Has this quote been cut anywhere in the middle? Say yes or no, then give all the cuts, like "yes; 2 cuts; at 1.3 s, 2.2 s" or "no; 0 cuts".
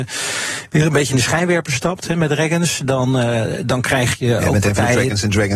no; 0 cuts